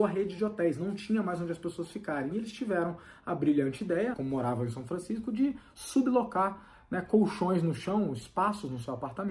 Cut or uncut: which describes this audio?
cut